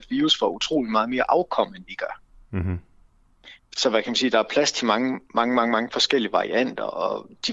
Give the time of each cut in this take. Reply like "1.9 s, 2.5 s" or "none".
none